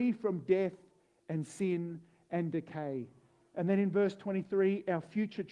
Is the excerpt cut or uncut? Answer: uncut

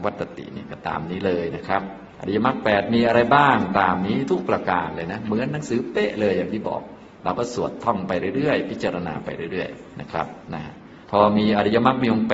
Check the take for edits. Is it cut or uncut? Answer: cut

